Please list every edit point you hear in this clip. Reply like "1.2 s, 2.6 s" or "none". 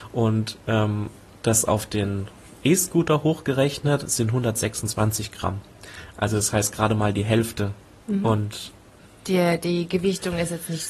9.0 s